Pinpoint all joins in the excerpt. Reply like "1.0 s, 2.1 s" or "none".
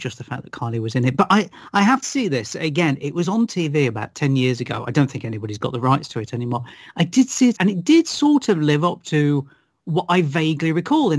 2.0 s, 7.6 s